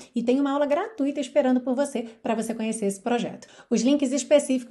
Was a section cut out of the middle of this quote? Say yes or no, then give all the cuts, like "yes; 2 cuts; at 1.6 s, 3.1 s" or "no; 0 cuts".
no; 0 cuts